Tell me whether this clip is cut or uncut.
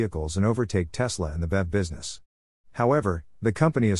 uncut